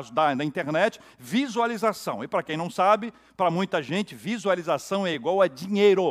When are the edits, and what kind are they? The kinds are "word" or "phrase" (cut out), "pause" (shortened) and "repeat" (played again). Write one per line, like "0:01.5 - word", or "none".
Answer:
none